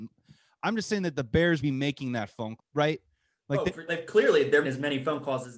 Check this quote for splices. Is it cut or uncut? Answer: cut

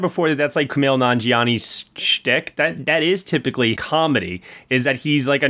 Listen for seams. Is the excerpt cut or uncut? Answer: cut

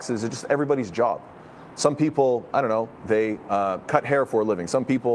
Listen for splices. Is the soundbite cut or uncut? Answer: uncut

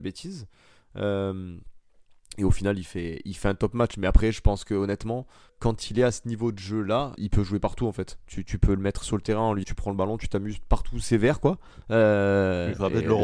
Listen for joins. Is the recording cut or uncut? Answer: cut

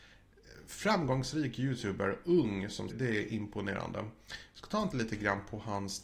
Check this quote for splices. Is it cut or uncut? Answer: cut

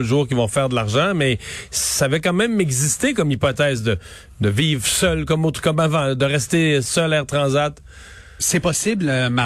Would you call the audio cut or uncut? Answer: uncut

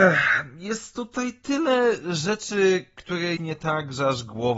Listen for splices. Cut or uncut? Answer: cut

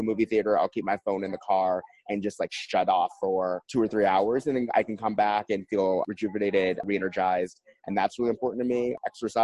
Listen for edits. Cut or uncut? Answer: uncut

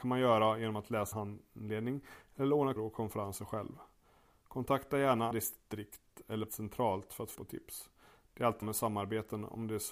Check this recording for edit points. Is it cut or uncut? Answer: cut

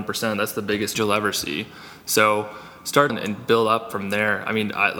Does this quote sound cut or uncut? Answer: cut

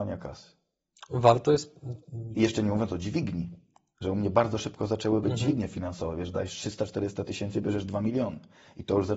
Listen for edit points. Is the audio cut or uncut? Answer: uncut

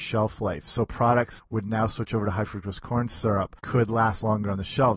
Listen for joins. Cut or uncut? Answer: cut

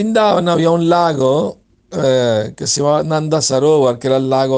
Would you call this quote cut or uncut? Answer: uncut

